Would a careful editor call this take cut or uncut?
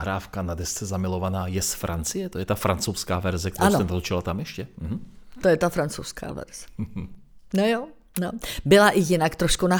uncut